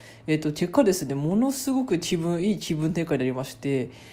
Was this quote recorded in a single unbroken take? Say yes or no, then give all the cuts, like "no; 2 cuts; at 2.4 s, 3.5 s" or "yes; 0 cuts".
yes; 0 cuts